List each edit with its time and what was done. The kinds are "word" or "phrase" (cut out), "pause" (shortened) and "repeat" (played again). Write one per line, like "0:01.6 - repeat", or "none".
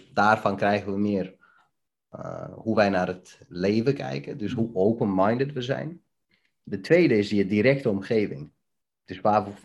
none